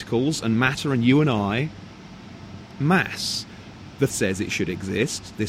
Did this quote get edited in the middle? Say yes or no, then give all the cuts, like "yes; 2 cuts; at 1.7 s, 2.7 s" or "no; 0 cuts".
yes; 1 cut; at 4.1 s